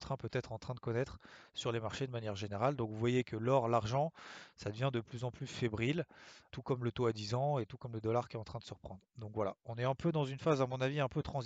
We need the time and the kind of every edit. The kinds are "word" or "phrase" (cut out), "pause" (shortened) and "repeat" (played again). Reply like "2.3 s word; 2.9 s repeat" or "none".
6.5 s word

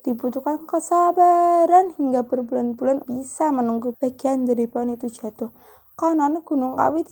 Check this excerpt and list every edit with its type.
3.0 s word; 3.9 s word

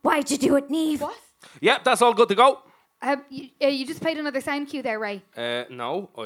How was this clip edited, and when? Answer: 2.8 s pause

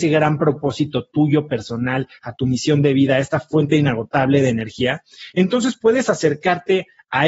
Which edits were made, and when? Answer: none

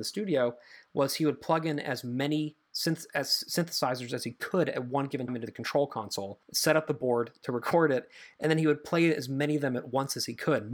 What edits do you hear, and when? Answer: 5.3 s word; 6.4 s pause

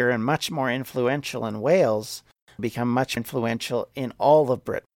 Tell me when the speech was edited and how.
2.6 s word; 3.2 s word

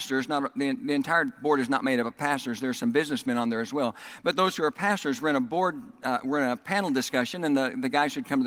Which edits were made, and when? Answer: none

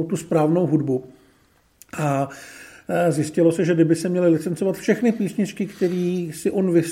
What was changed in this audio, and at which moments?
none

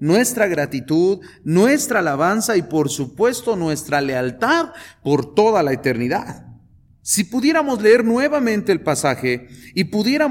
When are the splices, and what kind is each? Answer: 6.7 s pause

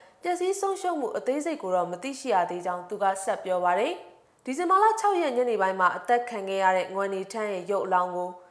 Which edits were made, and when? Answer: 4.3 s pause

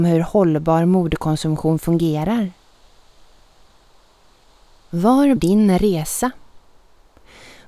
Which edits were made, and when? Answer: 5.4 s word

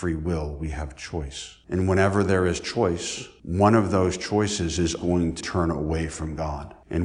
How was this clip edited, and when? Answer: 5.0 s word; 5.4 s phrase

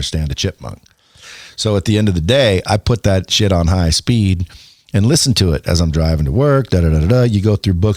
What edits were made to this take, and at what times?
none

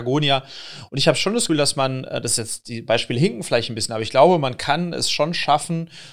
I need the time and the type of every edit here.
1.5 s word

